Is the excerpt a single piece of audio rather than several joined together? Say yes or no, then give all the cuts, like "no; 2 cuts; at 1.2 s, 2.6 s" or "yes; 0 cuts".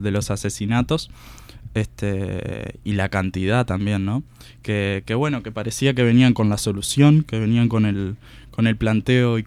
yes; 0 cuts